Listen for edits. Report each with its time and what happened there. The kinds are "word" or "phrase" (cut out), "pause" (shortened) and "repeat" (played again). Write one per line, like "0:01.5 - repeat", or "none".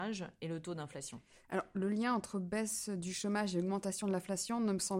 none